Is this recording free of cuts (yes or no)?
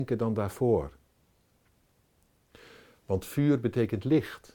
yes